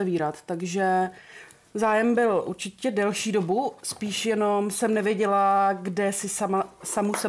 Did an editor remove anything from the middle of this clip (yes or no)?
no